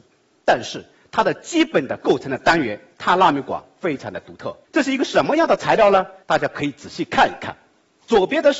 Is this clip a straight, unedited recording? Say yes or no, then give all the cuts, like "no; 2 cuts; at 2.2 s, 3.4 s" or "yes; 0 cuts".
no; 2 cuts; at 4.6 s, 6.2 s